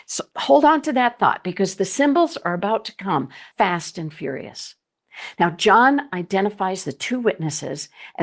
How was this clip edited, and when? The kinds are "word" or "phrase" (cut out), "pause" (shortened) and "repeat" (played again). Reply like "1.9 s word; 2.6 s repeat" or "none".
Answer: 3.5 s pause